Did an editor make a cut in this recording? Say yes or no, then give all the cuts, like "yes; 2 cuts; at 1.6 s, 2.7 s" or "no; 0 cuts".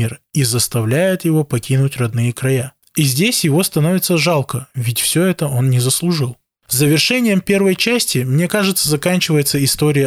no; 0 cuts